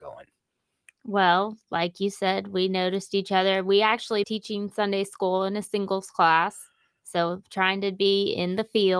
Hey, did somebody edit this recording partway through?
yes; 1 cut; at 4.2 s

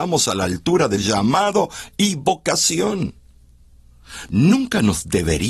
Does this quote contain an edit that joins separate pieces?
yes; 1 cut; at 1.0 s

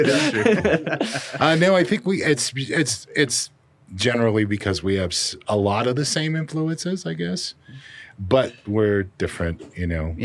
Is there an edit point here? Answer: no; 0 cuts

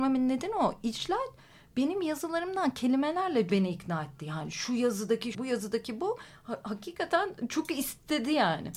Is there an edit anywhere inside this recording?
yes; 2 cuts; at 3.5 s, 5.3 s

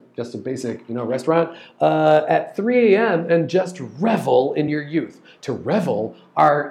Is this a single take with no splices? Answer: yes; 0 cuts

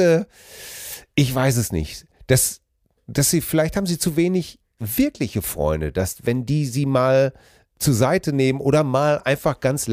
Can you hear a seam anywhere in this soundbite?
no; 0 cuts

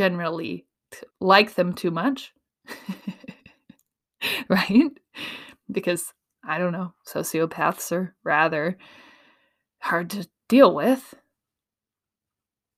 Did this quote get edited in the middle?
yes; 1 cut; at 1.1 s

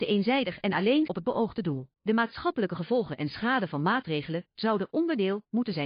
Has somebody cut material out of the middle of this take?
yes; 2 cuts; at 1.1 s, 1.9 s

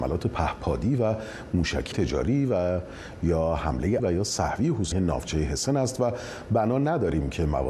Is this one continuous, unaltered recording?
no; 3 cuts; at 1.9 s, 4.0 s, 4.9 s

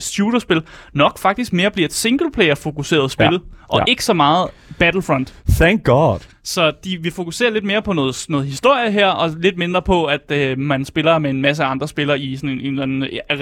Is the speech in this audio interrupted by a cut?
no; 0 cuts

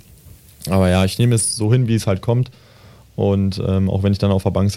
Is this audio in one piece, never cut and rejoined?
yes; 0 cuts

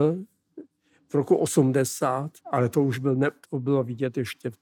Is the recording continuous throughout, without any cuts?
no; 2 cuts; at 2.4 s, 3.4 s

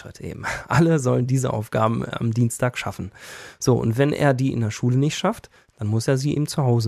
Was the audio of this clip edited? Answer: no; 0 cuts

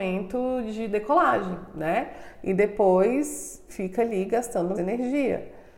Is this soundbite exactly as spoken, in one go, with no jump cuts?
no; 2 cuts; at 3.7 s, 4.7 s

